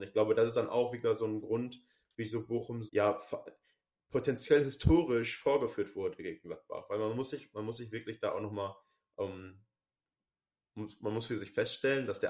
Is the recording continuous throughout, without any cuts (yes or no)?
no